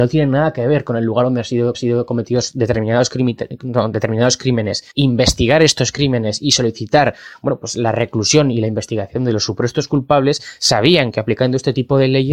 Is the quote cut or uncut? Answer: cut